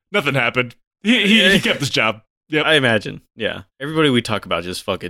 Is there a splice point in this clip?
yes; 1 cut; at 3.7 s

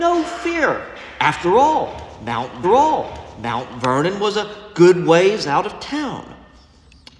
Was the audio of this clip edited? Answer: yes; 1 cut; at 2.6 s

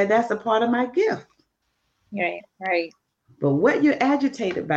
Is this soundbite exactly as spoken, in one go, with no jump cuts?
yes; 0 cuts

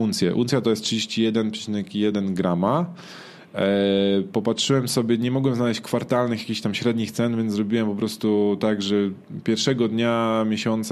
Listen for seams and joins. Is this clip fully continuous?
yes; 0 cuts

